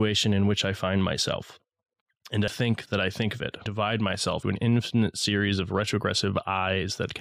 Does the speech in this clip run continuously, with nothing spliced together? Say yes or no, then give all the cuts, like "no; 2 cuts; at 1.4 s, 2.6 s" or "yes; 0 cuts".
no; 3 cuts; at 2.5 s, 3.7 s, 4.4 s